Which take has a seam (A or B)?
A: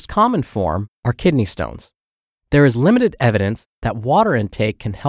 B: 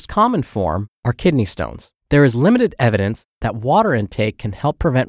B